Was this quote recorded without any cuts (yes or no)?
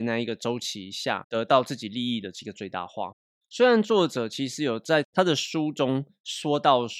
yes